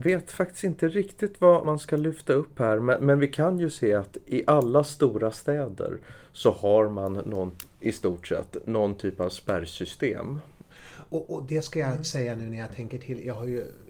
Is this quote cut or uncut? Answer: cut